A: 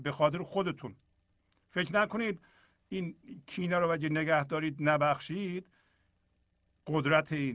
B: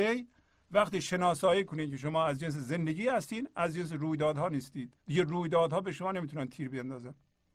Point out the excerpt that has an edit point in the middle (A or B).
B